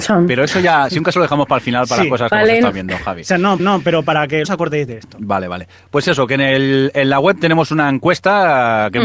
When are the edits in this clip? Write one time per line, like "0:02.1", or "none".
0:03.6
0:04.4